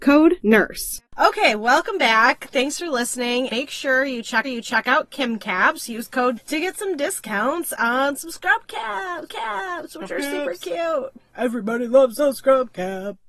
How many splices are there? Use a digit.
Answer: 5